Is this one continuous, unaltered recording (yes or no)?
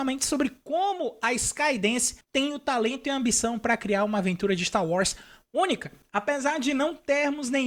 yes